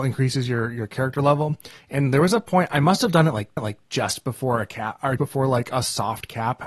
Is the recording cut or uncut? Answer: cut